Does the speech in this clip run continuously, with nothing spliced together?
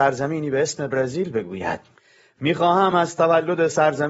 yes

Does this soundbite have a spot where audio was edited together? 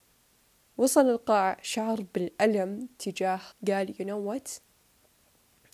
yes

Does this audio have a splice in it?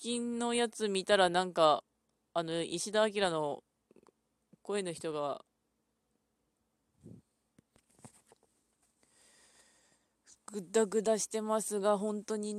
yes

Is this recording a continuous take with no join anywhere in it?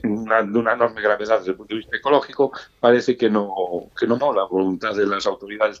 no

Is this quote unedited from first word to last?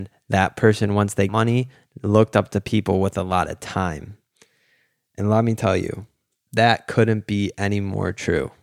no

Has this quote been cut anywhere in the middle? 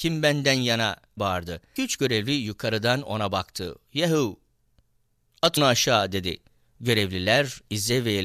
yes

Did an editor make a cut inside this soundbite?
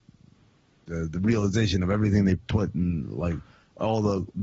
no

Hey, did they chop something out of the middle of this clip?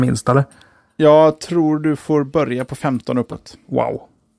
no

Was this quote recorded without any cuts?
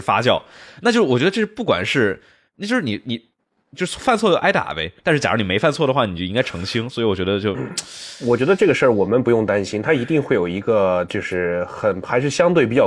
yes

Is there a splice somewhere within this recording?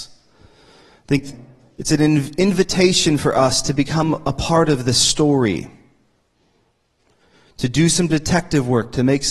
no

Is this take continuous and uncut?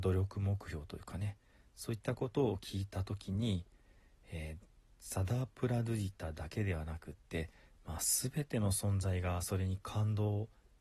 yes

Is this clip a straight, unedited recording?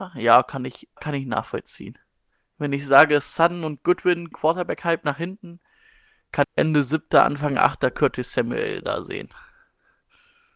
no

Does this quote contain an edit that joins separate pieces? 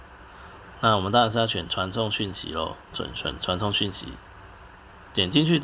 yes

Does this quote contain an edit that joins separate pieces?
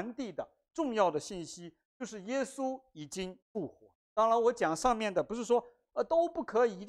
yes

